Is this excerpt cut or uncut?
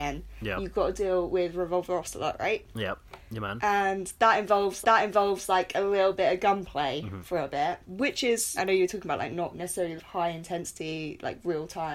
cut